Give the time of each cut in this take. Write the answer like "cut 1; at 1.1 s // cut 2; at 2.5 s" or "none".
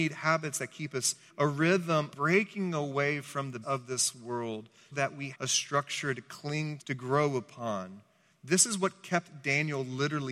cut 1; at 1.3 s // cut 2; at 2.1 s // cut 3; at 3.6 s // cut 4; at 4.9 s // cut 5; at 5.3 s // cut 6; at 6.8 s